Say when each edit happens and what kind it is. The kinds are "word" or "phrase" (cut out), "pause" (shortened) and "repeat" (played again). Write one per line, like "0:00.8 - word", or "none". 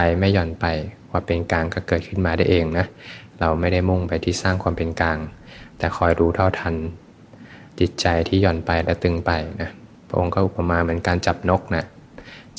0:07.7 - pause
0:09.9 - pause